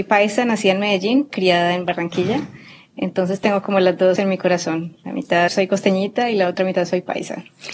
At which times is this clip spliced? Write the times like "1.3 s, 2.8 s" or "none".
1.3 s, 4.2 s, 5.5 s

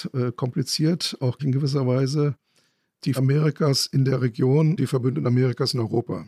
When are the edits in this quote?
1.4 s, 3.2 s, 4.8 s

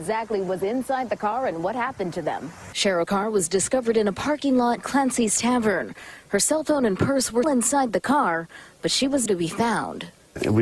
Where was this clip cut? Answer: 3.1 s, 4.8 s, 7.4 s, 9.3 s

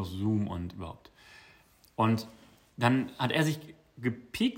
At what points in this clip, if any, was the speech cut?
none

